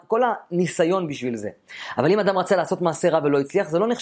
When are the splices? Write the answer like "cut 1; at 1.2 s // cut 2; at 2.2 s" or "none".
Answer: none